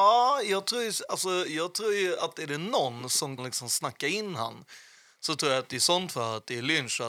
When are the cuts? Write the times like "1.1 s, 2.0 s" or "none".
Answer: 3.4 s